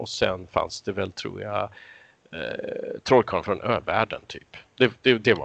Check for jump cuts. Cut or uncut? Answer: uncut